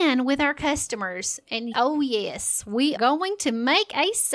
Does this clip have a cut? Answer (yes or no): yes